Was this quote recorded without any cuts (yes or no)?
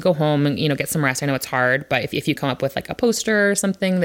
no